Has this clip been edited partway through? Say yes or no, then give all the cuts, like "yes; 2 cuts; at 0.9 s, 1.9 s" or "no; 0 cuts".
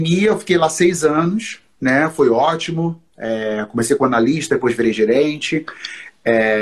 no; 0 cuts